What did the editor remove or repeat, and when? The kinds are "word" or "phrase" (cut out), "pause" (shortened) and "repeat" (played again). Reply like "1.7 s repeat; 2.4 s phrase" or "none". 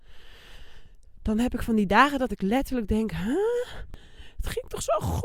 2.3 s phrase

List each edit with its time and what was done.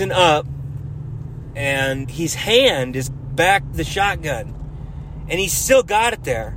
2.0 s word; 3.1 s word; 3.7 s word

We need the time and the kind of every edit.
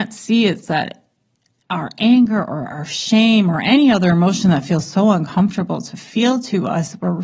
none

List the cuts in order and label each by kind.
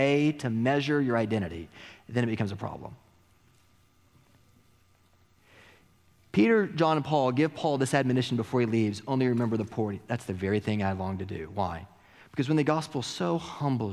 none

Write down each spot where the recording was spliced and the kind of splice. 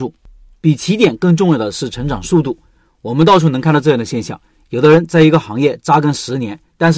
none

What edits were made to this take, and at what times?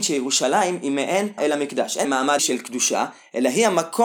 1.4 s word; 2.0 s word; 2.4 s word

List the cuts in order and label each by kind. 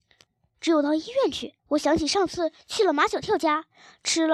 1.6 s pause

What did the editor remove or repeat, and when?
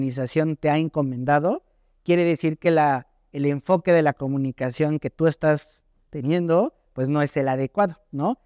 none

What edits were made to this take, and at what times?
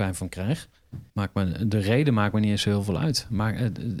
1.1 s pause

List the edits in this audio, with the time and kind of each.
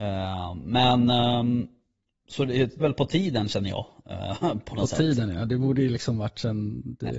2.8 s word

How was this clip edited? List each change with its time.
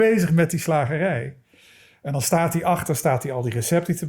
none

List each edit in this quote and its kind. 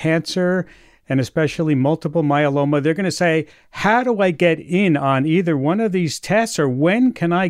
none

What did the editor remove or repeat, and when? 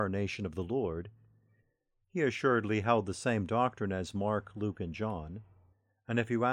none

